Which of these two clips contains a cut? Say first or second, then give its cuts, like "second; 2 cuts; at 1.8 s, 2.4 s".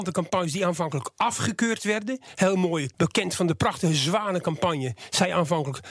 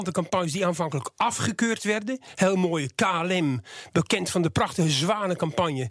first; 1 cut; at 2.9 s